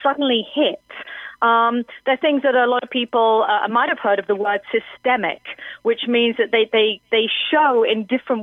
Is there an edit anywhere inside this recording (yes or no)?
no